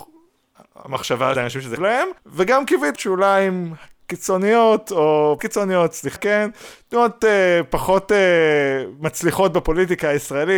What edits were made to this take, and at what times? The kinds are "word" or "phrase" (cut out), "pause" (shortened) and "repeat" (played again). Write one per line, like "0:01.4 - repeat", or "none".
0:01.4 - phrase
0:01.8 - word
0:02.2 - pause
0:03.0 - phrase
0:05.4 - word
0:06.2 - phrase